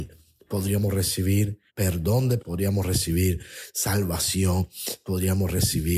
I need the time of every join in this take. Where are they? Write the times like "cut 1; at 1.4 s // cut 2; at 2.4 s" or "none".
cut 1; at 1.7 s // cut 2; at 2.4 s